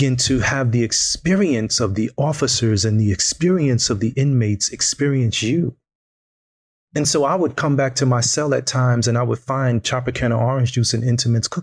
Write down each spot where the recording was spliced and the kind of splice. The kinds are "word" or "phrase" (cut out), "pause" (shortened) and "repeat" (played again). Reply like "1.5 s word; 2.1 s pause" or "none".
none